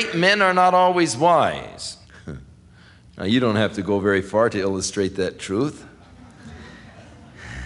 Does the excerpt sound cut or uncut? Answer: cut